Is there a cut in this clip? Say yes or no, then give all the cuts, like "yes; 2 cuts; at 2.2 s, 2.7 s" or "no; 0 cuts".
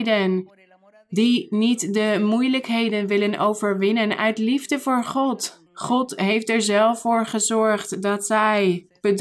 yes; 1 cut; at 5.7 s